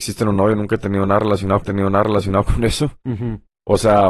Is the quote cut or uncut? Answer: cut